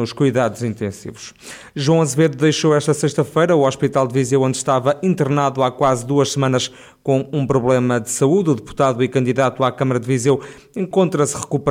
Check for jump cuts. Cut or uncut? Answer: uncut